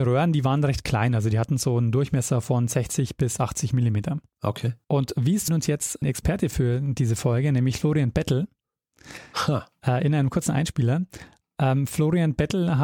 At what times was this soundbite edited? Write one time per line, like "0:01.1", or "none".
0:05.5
0:06.0